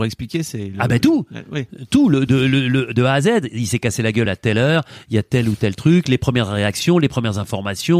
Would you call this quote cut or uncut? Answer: uncut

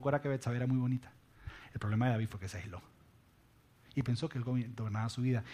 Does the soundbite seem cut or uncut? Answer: uncut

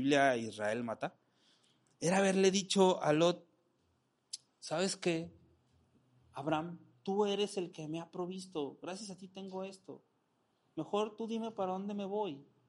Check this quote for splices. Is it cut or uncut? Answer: uncut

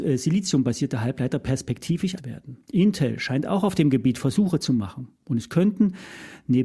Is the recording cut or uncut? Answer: cut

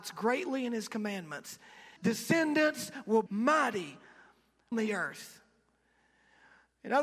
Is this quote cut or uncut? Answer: cut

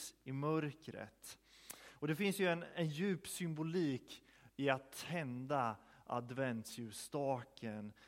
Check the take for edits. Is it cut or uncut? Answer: uncut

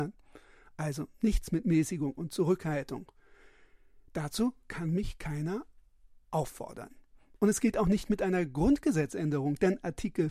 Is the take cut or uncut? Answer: uncut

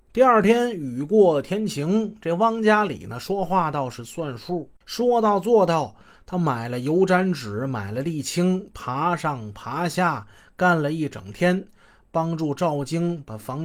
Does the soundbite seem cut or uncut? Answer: cut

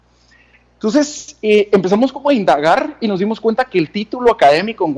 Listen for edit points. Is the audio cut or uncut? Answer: uncut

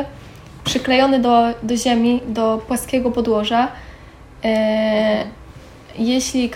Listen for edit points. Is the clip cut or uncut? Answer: uncut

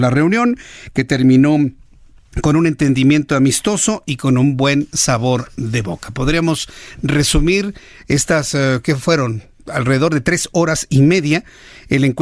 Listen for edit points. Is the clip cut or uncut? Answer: uncut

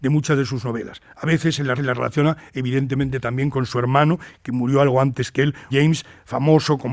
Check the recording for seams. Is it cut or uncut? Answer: cut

